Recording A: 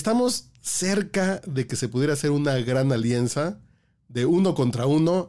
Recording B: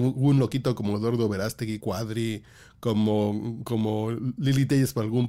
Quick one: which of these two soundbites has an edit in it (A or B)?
B